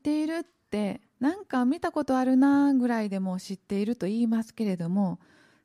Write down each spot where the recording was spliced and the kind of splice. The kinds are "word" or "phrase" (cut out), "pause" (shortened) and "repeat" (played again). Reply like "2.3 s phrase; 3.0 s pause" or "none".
1.1 s pause